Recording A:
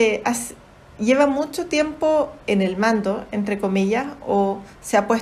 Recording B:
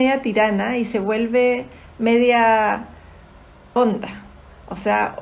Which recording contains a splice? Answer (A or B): B